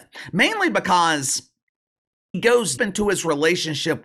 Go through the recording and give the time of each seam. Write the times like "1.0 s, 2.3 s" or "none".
2.3 s, 2.8 s